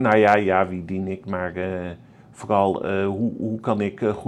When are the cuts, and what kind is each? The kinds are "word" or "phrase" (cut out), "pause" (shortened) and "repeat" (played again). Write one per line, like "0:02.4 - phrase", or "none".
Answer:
none